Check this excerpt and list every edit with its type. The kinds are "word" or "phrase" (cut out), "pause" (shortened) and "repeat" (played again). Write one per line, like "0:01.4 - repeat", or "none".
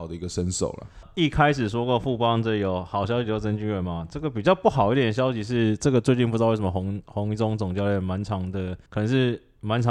0:08.9 - pause